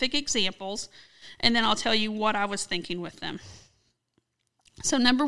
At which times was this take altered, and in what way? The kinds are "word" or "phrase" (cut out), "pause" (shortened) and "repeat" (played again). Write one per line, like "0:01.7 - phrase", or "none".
none